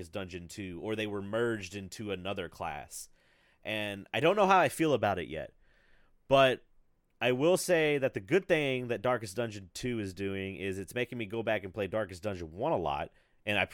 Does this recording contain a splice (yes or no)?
no